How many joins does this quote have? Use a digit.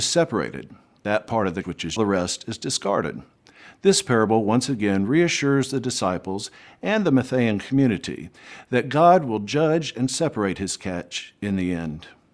2